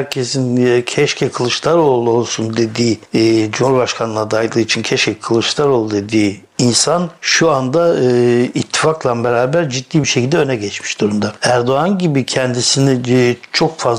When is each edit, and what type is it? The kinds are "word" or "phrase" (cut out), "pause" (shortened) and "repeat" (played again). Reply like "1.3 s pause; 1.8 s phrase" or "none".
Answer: none